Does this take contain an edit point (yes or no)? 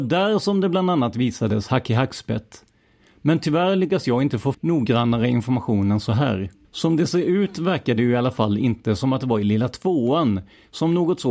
yes